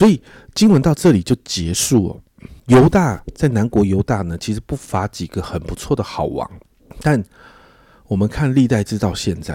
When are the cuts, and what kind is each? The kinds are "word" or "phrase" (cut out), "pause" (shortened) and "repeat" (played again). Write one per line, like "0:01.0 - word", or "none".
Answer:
0:02.6 - pause
0:06.7 - pause